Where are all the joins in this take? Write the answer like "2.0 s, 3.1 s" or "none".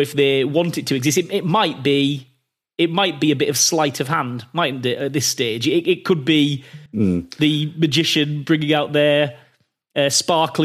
6.9 s